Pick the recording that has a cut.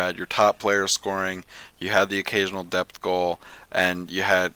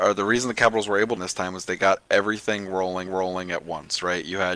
second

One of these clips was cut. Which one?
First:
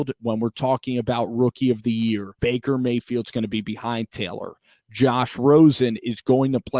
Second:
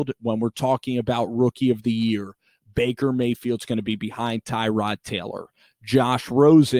first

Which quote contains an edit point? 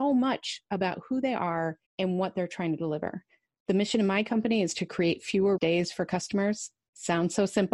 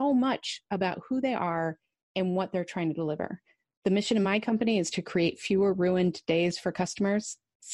first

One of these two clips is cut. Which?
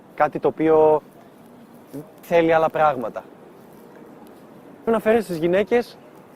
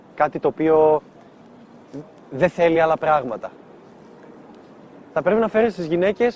first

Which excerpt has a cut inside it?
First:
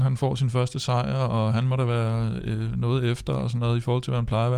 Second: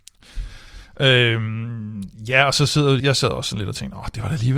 second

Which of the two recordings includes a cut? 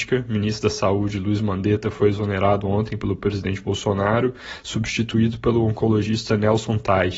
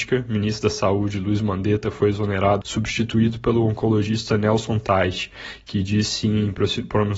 second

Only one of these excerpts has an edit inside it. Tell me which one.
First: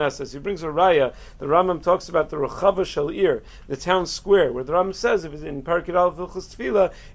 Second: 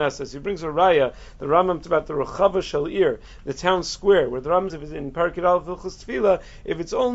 second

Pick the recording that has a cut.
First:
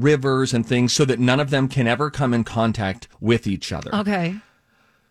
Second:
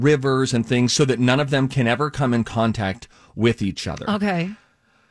first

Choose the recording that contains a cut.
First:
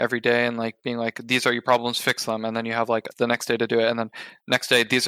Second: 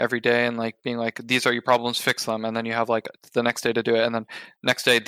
first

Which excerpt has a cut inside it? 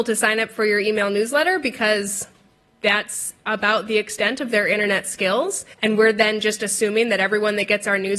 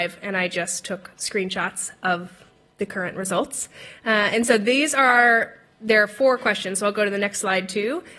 first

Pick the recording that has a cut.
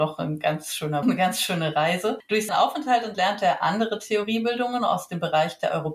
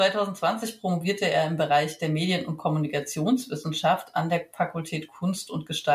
first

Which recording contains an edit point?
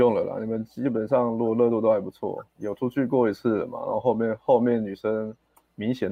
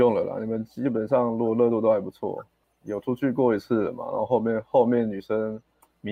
first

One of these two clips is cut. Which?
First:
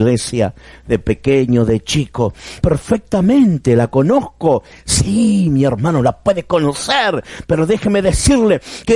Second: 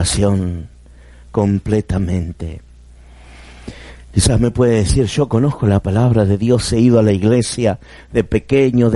first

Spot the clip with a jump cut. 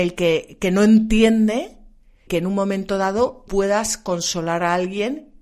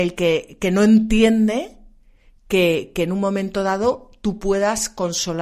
first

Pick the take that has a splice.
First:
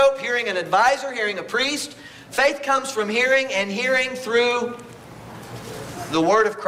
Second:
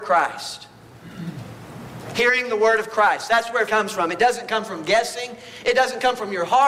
second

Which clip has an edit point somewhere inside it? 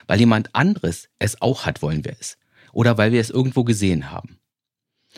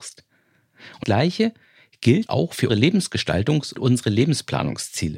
second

